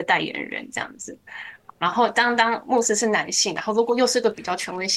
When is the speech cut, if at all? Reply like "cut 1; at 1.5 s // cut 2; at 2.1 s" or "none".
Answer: none